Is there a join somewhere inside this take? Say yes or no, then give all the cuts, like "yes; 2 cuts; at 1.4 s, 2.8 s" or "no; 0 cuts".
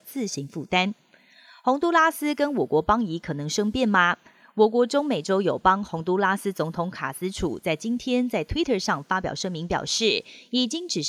no; 0 cuts